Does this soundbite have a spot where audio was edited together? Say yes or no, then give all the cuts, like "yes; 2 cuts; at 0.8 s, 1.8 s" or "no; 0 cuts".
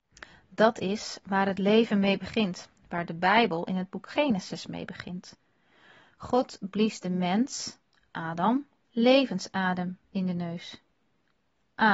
yes; 1 cut; at 2.8 s